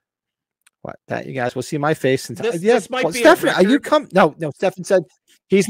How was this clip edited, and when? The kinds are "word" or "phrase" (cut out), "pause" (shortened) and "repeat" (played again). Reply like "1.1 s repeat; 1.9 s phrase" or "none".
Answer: 1.0 s pause